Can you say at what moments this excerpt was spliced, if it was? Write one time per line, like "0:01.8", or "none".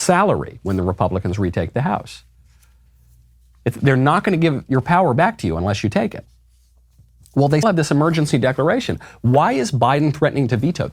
0:07.6